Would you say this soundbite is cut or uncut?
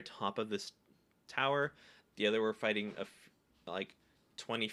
uncut